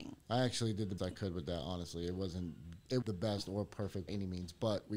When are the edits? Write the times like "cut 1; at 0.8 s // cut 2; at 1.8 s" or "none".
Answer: cut 1; at 1.0 s // cut 2; at 3.0 s // cut 3; at 4.1 s